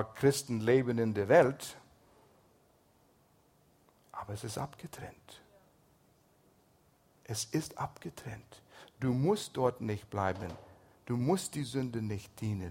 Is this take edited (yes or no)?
no